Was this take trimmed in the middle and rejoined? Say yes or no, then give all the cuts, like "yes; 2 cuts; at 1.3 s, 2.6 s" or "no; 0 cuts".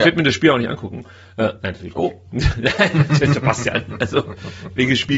no; 0 cuts